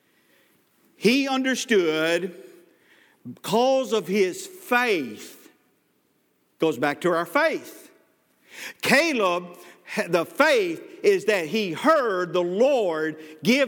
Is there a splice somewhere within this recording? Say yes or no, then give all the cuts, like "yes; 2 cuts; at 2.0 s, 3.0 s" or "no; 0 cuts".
no; 0 cuts